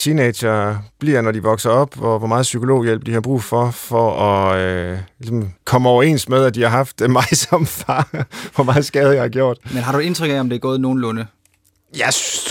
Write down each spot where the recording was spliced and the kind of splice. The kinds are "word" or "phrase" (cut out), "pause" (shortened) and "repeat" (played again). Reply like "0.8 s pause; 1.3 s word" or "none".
5.6 s pause